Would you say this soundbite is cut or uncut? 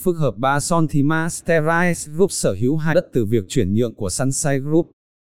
cut